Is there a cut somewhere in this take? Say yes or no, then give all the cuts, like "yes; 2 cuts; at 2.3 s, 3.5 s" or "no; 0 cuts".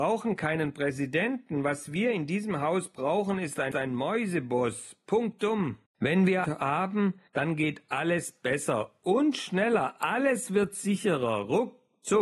yes; 4 cuts; at 3.7 s, 5.9 s, 6.4 s, 7.3 s